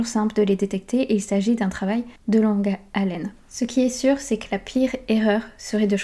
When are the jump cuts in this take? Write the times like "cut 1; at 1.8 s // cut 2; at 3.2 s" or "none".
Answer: cut 1; at 2.2 s // cut 2; at 3.4 s